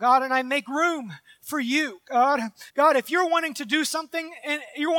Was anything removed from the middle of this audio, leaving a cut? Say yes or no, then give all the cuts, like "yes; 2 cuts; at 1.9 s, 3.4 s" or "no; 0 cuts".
yes; 1 cut; at 2.7 s